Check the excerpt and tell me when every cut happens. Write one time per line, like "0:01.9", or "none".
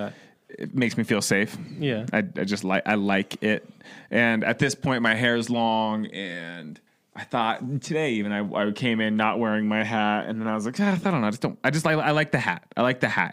0:06.9

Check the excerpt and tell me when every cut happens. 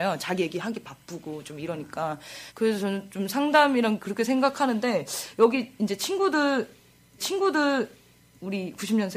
0:02.5
0:07.2

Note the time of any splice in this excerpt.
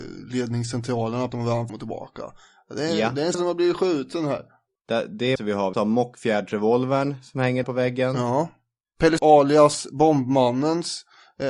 0:01.3
0:01.7
0:03.3
0:05.4
0:05.7
0:07.6
0:09.2

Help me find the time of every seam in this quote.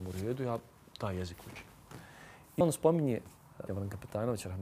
0:02.6
0:03.7

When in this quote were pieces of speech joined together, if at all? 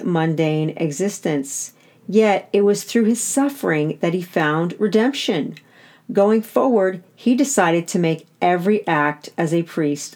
none

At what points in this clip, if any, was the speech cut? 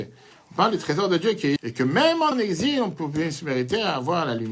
0:01.6
0:02.3

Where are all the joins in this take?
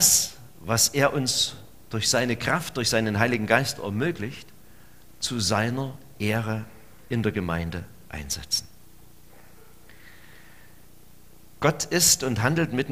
none

